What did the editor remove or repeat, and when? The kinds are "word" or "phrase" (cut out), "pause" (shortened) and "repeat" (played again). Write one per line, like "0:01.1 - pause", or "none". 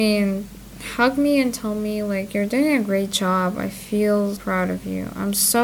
0:04.4 - word